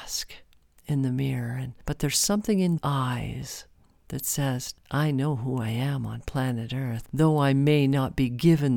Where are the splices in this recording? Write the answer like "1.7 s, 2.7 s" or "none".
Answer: 2.8 s, 7.1 s